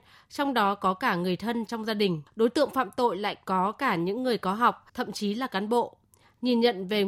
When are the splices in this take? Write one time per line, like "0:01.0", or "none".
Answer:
0:02.3
0:04.9